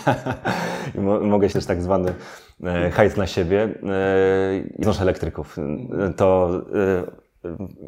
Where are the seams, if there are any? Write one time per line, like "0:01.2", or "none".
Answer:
0:01.5
0:04.8

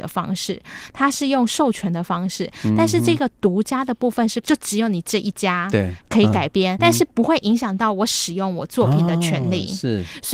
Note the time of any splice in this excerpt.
0:06.8

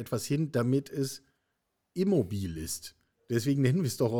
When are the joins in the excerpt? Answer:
none

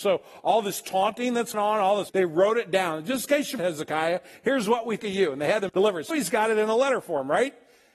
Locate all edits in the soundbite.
0:01.5
0:02.1
0:03.6
0:05.0
0:05.7
0:06.1

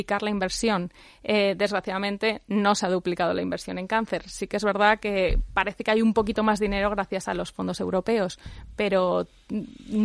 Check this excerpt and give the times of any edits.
none

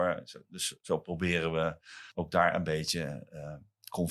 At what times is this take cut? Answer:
0:02.1

